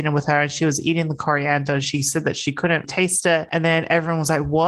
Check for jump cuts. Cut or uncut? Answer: cut